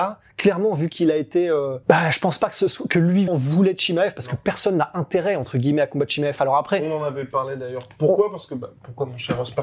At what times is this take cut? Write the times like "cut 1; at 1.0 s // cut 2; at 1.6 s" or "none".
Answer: cut 1; at 1.8 s // cut 2; at 3.3 s

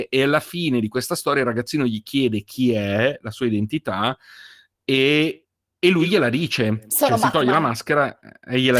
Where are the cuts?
none

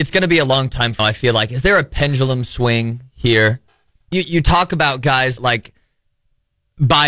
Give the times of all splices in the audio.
cut 1; at 1.0 s // cut 2; at 4.1 s // cut 3; at 5.4 s

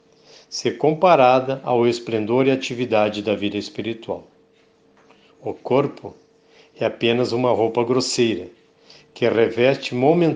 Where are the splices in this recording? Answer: none

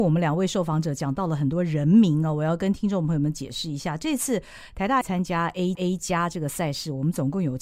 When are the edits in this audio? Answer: cut 1; at 5.0 s // cut 2; at 5.7 s

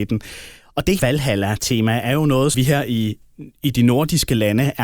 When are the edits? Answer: cut 1; at 1.0 s // cut 2; at 2.5 s

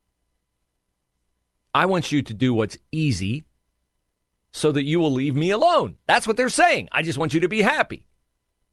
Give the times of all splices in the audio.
none

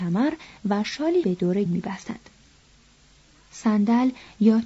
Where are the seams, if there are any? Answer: cut 1; at 1.2 s // cut 2; at 1.7 s

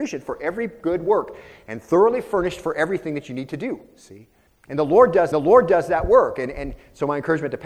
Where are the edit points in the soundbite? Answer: cut 1; at 4.5 s // cut 2; at 5.3 s

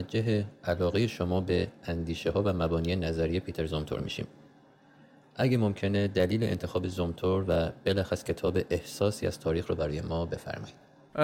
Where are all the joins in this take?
none

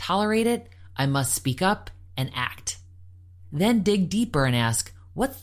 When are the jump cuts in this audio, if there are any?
none

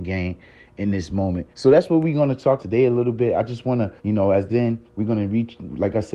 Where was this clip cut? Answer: cut 1; at 1.5 s // cut 2; at 2.6 s // cut 3; at 4.0 s // cut 4; at 4.5 s // cut 5; at 4.9 s

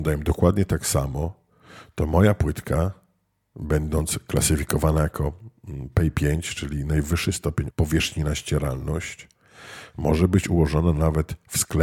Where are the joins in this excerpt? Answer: cut 1; at 7.7 s

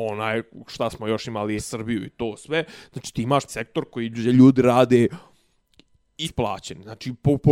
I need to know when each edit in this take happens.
cut 1; at 1.6 s // cut 2; at 3.5 s // cut 3; at 6.2 s

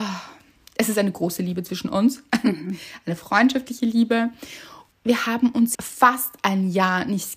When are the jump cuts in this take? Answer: cut 1; at 4.9 s // cut 2; at 5.7 s

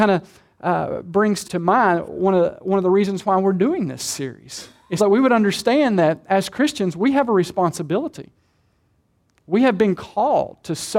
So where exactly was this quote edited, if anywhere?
cut 1; at 1.4 s // cut 2; at 5.0 s

